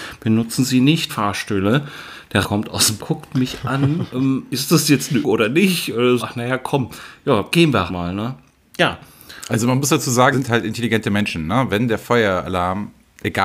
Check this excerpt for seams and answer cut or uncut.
cut